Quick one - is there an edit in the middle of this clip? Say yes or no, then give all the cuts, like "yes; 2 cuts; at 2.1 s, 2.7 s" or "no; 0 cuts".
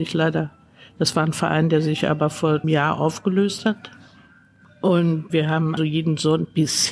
yes; 3 cuts; at 2.6 s, 5.3 s, 5.8 s